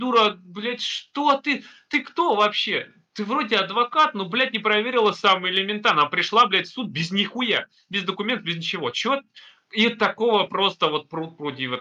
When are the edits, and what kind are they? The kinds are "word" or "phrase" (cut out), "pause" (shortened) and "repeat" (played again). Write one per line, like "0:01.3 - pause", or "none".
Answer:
none